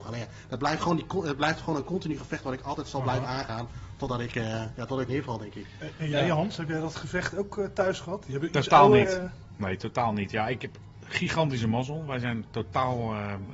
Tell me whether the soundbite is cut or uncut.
cut